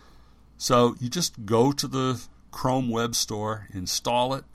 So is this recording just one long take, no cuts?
yes; 0 cuts

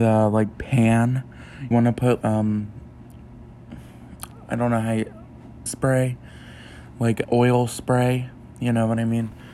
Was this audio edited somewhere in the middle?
yes; 4 cuts; at 1.7 s, 2.2 s, 5.7 s, 7.2 s

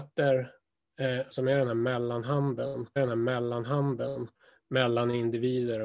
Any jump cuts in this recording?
yes; 2 cuts; at 1.3 s, 3.0 s

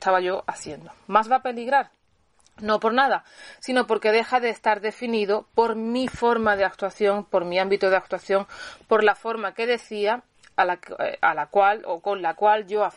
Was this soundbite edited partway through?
no; 0 cuts

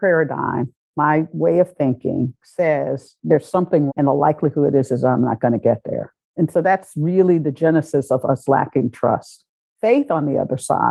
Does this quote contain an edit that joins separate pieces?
yes; 1 cut; at 3.9 s

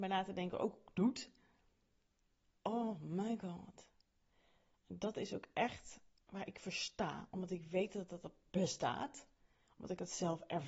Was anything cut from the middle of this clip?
no; 0 cuts

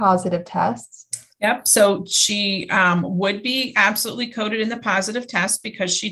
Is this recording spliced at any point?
no; 0 cuts

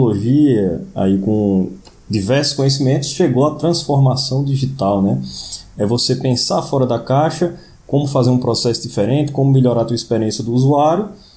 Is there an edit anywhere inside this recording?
no; 0 cuts

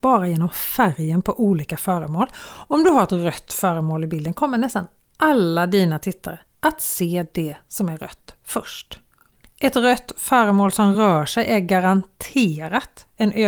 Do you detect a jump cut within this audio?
no; 0 cuts

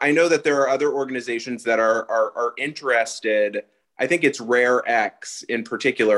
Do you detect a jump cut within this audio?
no; 0 cuts

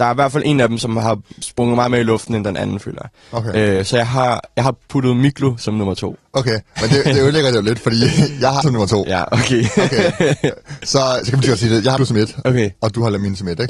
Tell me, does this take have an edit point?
yes; 3 cuts; at 1.3 s, 8.6 s, 12.0 s

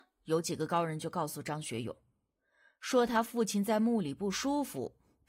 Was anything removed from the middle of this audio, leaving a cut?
no; 0 cuts

